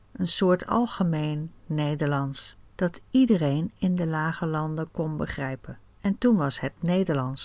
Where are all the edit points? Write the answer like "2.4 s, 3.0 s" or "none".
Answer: 2.7 s, 5.9 s